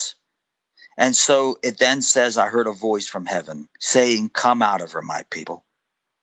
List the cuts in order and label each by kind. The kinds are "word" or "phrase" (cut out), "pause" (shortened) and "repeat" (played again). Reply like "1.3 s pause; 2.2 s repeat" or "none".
3.7 s pause